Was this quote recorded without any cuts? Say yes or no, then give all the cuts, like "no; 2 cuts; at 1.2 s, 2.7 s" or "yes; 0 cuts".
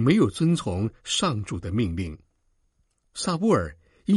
yes; 0 cuts